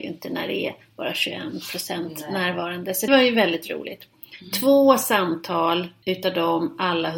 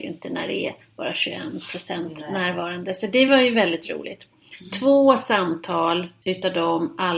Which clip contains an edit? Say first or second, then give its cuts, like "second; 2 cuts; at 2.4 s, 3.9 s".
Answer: first; 1 cut; at 3.1 s